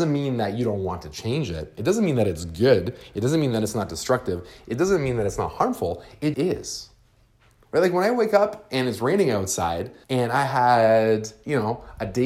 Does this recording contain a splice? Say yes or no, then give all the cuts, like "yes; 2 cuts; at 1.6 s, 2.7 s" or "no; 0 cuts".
yes; 2 cuts; at 6.3 s, 10.0 s